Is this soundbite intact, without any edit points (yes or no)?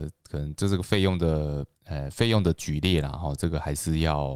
no